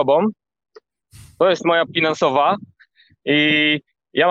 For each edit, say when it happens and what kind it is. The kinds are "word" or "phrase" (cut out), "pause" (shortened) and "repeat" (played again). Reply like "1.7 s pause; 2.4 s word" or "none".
1.9 s word